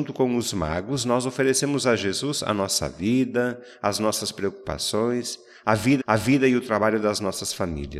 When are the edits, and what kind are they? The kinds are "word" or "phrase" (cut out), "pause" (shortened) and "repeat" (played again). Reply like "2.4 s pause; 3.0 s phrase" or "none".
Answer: 6.0 s repeat